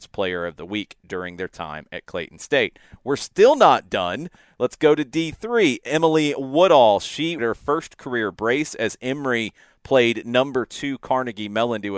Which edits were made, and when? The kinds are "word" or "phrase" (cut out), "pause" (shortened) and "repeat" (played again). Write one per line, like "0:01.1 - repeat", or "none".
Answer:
0:07.4 - word